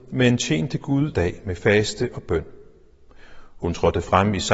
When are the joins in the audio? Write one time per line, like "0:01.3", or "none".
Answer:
0:01.1